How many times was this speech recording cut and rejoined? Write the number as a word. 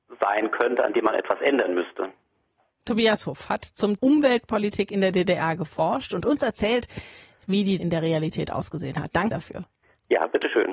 three